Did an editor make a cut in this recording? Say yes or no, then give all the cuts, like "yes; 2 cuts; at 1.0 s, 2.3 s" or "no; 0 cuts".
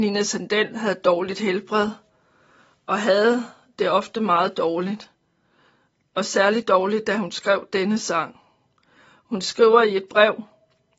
no; 0 cuts